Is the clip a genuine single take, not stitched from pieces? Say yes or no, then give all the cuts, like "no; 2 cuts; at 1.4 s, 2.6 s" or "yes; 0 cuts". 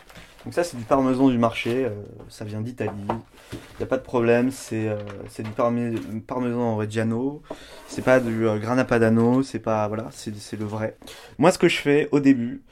yes; 0 cuts